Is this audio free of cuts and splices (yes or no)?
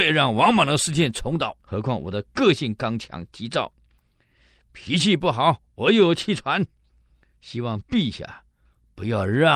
no